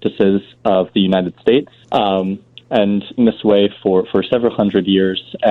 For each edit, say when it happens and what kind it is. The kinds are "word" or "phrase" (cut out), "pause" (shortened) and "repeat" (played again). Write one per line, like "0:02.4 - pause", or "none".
0:01.8 - pause
0:03.2 - phrase